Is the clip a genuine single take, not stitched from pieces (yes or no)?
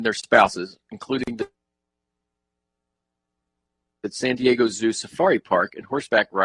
yes